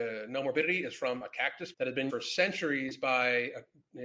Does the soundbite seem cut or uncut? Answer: cut